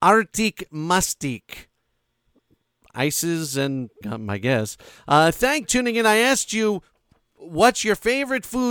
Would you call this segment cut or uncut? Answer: cut